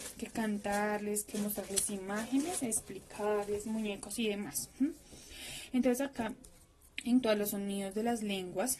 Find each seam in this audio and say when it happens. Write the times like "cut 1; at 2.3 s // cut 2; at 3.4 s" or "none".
cut 1; at 7.2 s